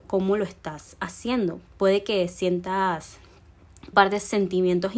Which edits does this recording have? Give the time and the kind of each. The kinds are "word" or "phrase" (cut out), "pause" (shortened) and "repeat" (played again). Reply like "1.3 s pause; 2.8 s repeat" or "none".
3.9 s word